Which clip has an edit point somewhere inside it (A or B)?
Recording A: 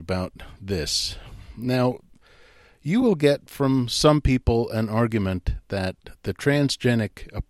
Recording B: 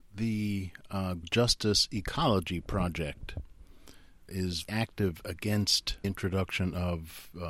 B